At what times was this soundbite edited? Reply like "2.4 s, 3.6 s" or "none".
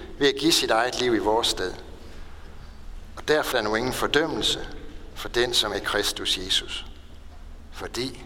3.5 s, 5.7 s